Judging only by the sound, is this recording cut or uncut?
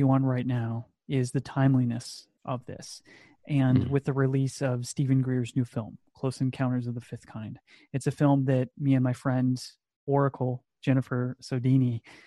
uncut